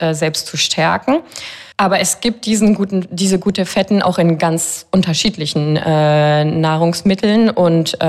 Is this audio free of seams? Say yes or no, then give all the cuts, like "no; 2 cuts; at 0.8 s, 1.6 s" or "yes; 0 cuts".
no; 1 cut; at 1.7 s